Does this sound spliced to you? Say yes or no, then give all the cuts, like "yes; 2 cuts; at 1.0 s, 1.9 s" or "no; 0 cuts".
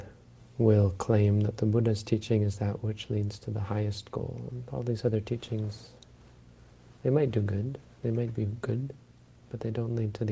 no; 0 cuts